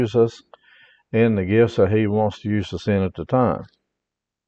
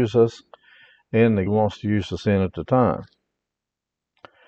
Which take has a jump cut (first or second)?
second